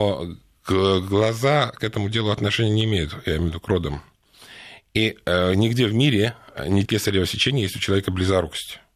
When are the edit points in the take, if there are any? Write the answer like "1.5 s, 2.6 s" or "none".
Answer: 6.9 s